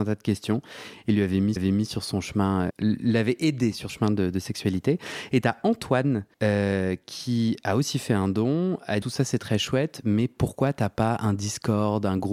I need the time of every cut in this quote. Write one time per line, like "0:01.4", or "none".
0:01.6
0:02.7
0:03.9
0:06.3
0:09.0